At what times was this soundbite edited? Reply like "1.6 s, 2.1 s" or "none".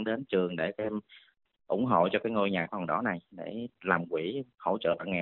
none